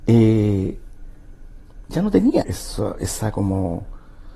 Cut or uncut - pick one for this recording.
cut